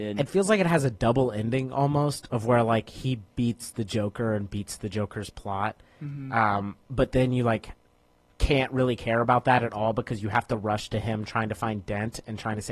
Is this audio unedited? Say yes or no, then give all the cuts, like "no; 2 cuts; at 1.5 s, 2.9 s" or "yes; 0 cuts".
yes; 0 cuts